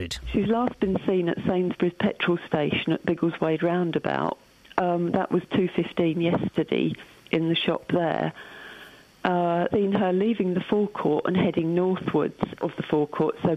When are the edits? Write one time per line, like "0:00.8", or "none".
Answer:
0:09.7
0:12.6